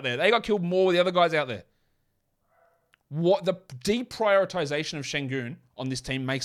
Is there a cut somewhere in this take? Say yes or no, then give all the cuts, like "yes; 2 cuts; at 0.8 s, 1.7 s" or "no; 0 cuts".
no; 0 cuts